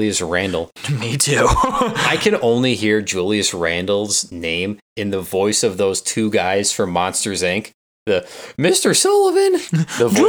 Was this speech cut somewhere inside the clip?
no; 0 cuts

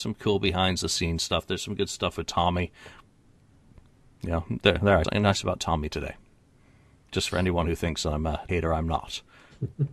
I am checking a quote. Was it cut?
yes; 2 cuts; at 5.0 s, 8.5 s

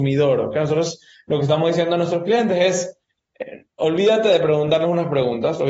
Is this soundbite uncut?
yes; 0 cuts

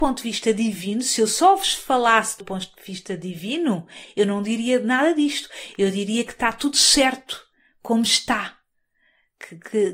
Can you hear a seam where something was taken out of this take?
yes; 1 cut; at 2.4 s

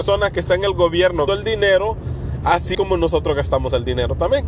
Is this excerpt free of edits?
no; 2 cuts; at 1.3 s, 2.7 s

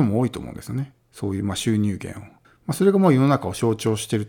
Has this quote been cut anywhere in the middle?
yes; 2 cuts; at 1.0 s, 2.4 s

